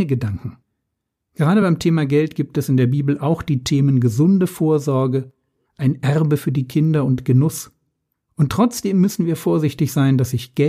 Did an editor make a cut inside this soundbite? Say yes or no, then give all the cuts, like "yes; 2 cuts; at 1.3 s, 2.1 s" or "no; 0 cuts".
no; 0 cuts